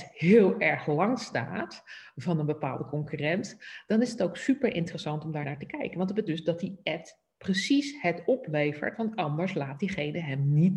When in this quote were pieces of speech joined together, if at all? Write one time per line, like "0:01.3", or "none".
0:05.4
0:06.3